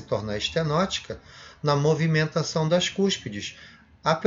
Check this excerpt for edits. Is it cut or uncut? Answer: uncut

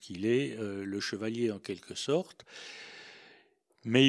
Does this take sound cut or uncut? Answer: uncut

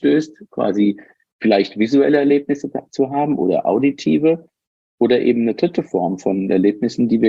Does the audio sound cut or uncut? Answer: uncut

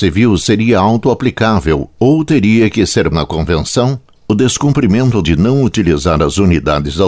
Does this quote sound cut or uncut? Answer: cut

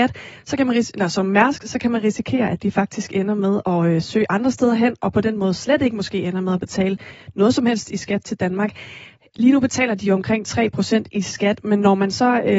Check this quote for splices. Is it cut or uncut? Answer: uncut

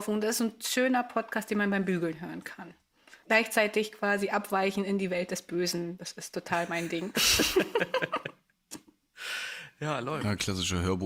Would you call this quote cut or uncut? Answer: cut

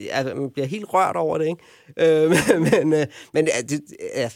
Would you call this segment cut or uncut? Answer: uncut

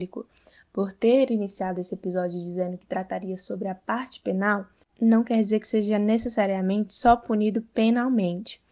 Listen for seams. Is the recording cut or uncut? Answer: uncut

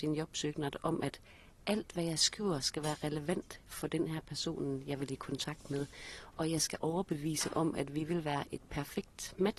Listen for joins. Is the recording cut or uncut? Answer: uncut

